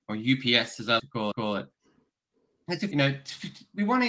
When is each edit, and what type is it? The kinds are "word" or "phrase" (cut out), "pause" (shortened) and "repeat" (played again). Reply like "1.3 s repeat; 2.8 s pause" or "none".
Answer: 1.0 s word; 1.3 s repeat; 2.9 s phrase